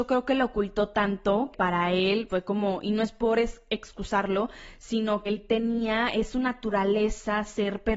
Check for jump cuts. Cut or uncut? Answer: cut